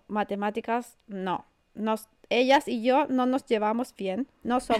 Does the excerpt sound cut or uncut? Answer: uncut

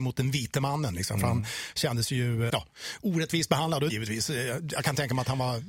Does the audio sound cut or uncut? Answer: cut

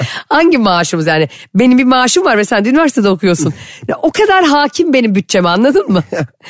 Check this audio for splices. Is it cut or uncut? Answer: uncut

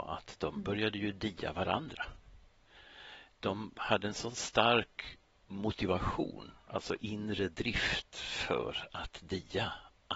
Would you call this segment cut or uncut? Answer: uncut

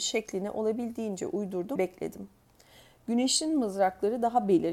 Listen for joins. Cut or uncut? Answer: cut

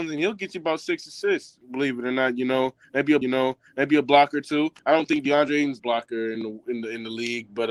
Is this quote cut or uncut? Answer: cut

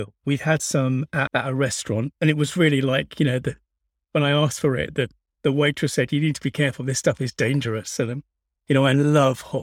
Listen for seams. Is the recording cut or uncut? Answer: cut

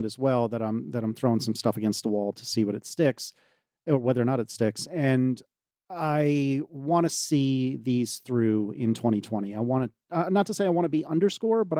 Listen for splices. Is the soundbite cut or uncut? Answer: uncut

